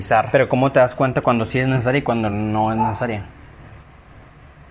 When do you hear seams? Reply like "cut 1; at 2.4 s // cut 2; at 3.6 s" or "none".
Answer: none

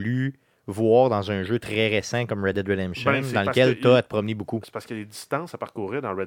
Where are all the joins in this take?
none

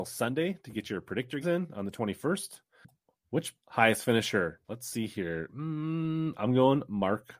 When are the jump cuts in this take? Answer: cut 1; at 1.4 s // cut 2; at 3.6 s // cut 3; at 4.6 s

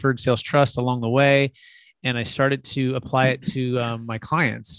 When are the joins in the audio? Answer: none

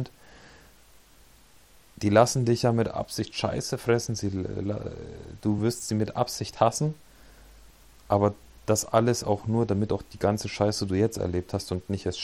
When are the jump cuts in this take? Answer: none

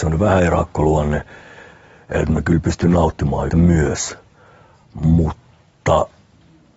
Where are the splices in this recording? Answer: cut 1; at 3.5 s

